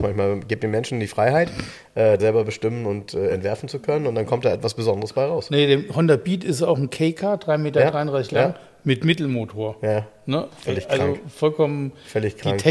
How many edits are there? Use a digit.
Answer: 1